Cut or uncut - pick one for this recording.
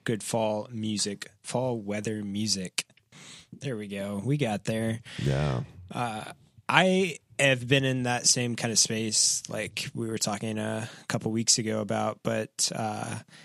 uncut